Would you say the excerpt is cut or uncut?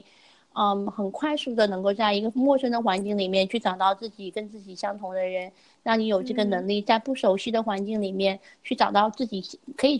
uncut